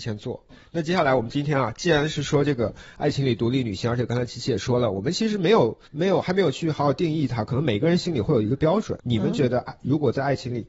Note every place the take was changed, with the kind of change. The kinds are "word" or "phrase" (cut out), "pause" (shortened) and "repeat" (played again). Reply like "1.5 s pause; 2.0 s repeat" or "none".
5.9 s pause; 9.0 s pause